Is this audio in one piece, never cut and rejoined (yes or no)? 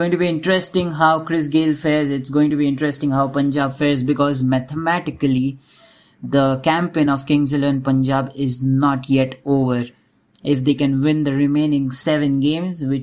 yes